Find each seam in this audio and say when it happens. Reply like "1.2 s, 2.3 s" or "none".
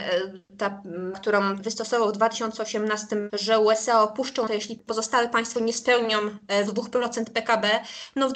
1.1 s, 1.6 s, 3.3 s, 4.5 s, 5.6 s, 6.7 s